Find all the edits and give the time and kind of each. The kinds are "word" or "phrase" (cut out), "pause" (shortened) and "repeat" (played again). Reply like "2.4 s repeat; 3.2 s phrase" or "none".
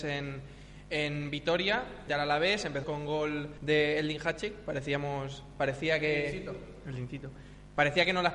2.1 s word; 2.8 s phrase; 3.6 s pause